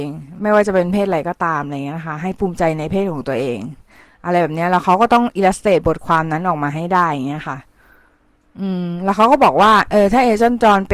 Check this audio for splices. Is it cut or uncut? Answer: uncut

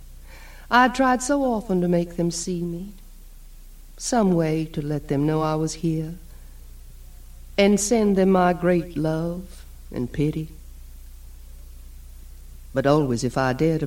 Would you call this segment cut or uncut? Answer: uncut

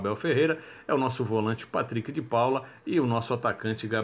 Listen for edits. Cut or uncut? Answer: uncut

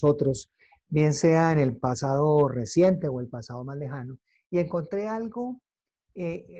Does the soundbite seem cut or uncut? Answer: uncut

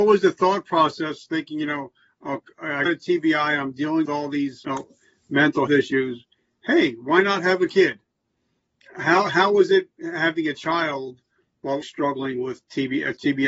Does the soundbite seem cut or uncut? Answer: cut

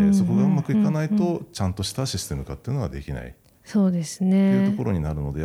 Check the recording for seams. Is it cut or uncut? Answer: cut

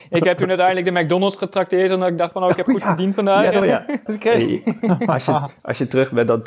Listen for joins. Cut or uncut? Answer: cut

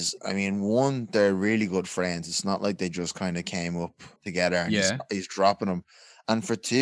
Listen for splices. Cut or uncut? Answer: cut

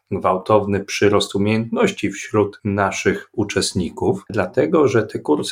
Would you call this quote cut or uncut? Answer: cut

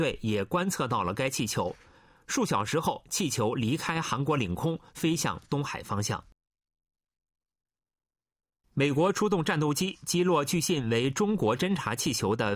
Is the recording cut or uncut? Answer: uncut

